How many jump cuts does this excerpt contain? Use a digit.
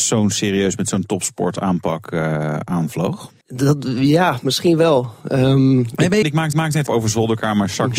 4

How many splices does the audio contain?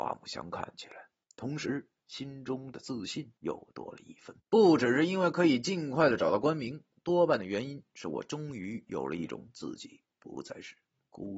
3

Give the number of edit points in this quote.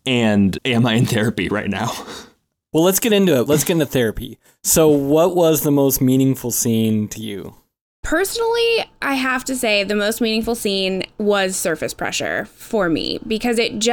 0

